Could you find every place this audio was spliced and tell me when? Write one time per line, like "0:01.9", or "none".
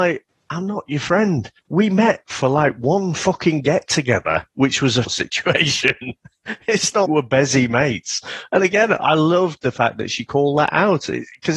0:01.6
0:05.0
0:07.1